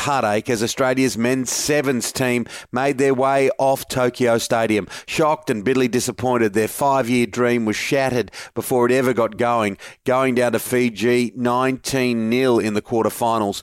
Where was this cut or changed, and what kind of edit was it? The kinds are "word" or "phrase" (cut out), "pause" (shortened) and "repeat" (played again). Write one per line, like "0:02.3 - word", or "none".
none